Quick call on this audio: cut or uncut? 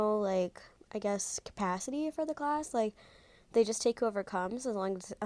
uncut